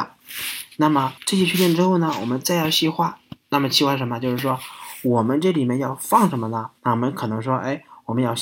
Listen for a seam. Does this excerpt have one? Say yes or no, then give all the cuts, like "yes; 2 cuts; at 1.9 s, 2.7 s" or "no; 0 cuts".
yes; 2 cuts; at 1.2 s, 6.8 s